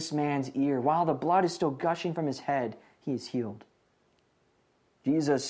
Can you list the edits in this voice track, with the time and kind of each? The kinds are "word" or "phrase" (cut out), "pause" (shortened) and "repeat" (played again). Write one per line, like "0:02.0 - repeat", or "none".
none